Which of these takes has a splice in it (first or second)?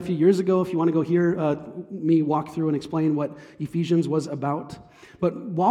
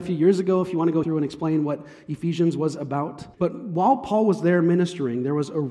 second